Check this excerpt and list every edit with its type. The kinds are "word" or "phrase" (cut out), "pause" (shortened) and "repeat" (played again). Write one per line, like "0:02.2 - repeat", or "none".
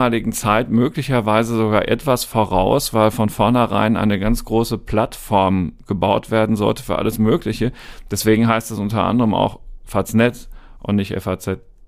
none